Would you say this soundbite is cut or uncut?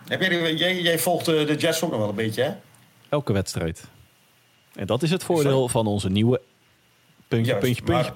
uncut